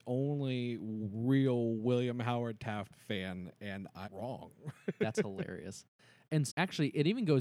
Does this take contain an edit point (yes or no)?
yes